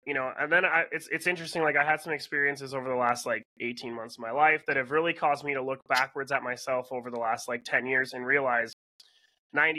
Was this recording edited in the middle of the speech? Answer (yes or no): no